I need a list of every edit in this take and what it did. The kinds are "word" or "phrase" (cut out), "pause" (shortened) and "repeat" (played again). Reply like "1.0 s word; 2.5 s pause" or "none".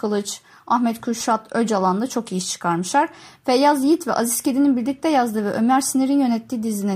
none

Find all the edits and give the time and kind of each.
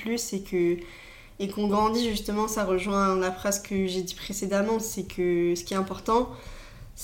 none

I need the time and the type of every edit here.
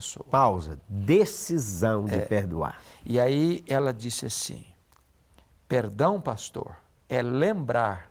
none

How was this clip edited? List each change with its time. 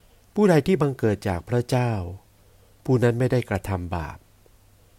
none

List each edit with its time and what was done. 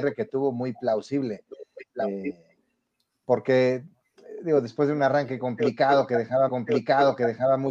6.5 s repeat

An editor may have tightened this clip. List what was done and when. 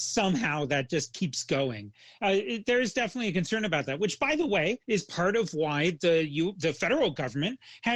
4.8 s pause

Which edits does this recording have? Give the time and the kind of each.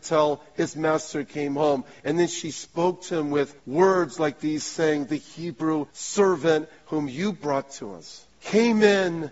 3.6 s pause; 5.9 s pause; 8.3 s pause

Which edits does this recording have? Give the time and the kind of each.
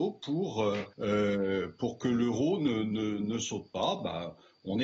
0.9 s pause

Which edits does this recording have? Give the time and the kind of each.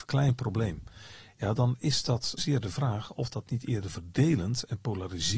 2.4 s word

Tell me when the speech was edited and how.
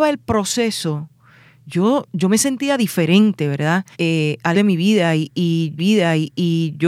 2.1 s word; 3.9 s pause; 4.5 s word; 5.8 s repeat

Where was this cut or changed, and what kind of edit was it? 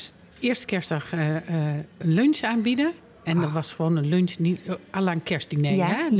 none

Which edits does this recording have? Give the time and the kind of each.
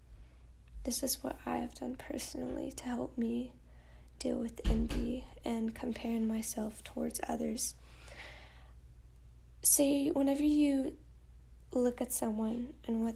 none

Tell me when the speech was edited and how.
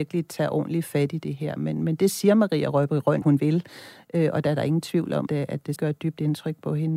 3.2 s word; 5.3 s word; 5.8 s word

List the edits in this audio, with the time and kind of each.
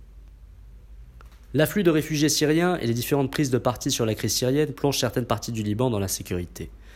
none

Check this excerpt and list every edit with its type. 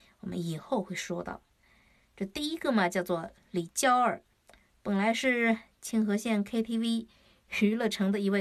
none

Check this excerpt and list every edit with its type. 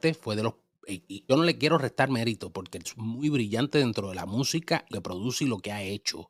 1.3 s word; 2.8 s word; 4.9 s word

